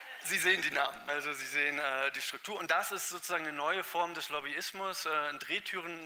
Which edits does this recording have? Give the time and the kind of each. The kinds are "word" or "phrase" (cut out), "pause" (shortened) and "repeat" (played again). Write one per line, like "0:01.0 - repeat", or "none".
0:01.1 - word